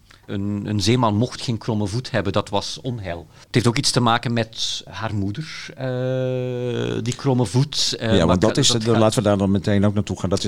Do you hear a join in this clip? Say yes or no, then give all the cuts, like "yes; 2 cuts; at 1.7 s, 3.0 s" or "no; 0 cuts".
yes; 2 cuts; at 3.4 s, 4.9 s